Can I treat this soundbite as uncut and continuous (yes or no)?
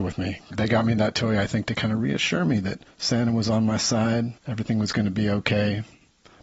no